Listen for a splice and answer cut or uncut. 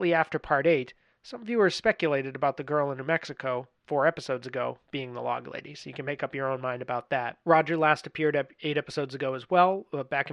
cut